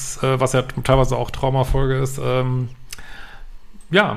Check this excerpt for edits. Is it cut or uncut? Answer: uncut